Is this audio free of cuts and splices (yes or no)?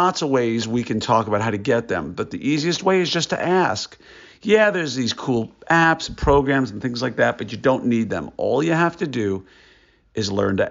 yes